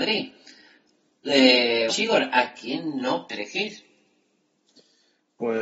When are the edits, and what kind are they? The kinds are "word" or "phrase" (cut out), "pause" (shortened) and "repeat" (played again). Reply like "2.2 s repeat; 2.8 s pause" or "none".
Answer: 1.9 s word; 3.3 s word